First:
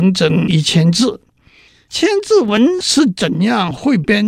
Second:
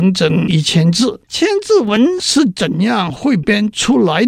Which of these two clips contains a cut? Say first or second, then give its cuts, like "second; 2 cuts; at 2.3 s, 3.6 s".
second; 1 cut; at 1.2 s